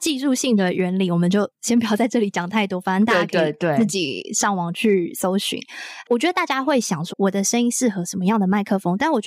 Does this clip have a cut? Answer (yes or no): yes